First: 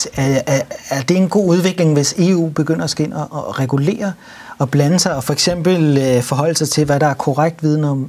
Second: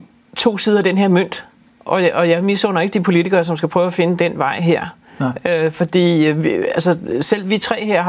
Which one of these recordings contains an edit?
second; 1 cut; at 1.7 s

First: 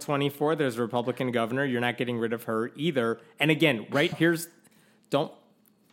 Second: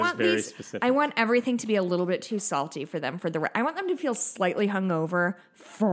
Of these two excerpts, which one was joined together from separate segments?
first; 1 cut; at 4.1 s

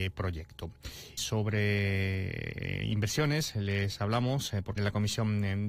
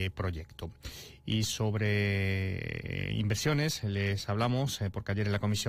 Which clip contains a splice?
first; 2 cuts; at 1.2 s, 4.8 s

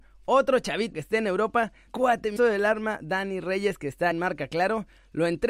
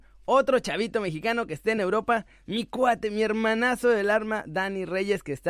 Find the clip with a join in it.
first; 4 cuts; at 0.9 s, 1.9 s, 2.4 s, 4.1 s

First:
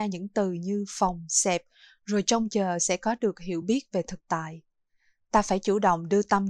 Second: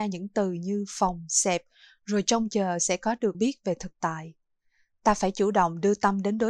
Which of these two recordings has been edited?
second; 1 cut; at 3.3 s

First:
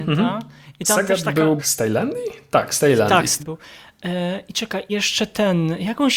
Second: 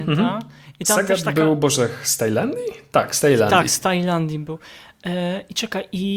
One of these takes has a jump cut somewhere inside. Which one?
first; 3 cuts; at 1.6 s, 3.4 s, 4.9 s

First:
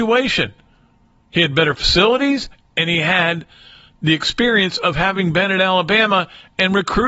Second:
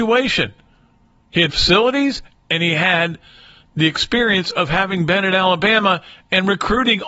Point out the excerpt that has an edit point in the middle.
second; 1 cut; at 1.5 s

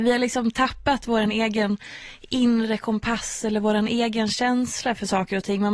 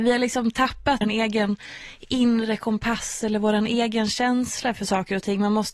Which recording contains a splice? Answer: second; 1 cut; at 1.0 s

